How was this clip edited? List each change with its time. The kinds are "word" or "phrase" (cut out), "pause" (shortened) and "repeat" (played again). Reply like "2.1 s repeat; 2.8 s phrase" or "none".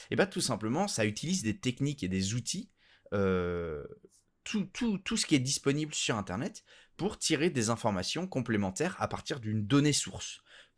none